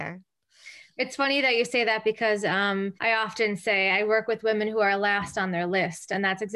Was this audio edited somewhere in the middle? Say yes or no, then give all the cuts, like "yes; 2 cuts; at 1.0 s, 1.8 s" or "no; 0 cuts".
yes; 1 cut; at 3.0 s